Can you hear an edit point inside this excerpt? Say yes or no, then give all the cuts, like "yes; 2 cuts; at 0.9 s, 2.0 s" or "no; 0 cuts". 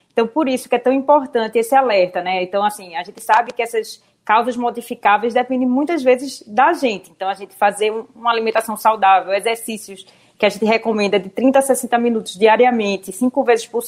no; 0 cuts